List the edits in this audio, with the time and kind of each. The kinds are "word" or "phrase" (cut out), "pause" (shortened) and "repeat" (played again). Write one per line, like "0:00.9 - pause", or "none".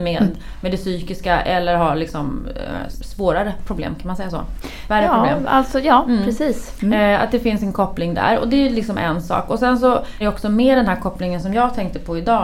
0:10.2 - word